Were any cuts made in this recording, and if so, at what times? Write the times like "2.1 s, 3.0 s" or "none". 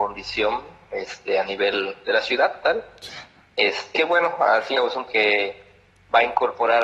2.0 s, 2.6 s, 3.9 s, 4.7 s, 5.1 s